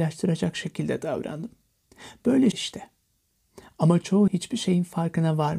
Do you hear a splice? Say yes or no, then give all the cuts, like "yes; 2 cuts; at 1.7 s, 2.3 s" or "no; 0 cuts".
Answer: yes; 2 cuts; at 2.5 s, 4.3 s